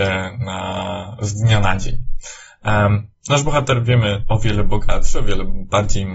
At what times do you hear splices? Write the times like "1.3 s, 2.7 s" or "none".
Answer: 3.1 s, 4.2 s